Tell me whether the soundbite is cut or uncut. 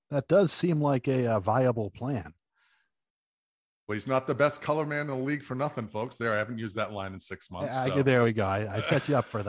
uncut